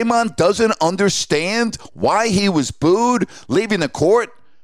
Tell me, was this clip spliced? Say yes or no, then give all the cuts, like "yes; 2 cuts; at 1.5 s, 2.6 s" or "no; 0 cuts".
no; 0 cuts